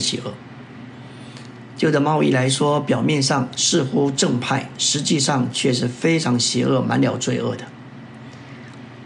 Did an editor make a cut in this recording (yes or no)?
no